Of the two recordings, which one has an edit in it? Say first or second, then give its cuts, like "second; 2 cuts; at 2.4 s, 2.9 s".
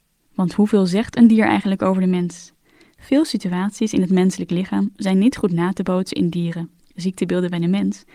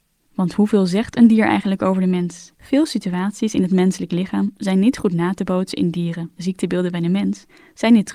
second; 2 cuts; at 2.5 s, 6.3 s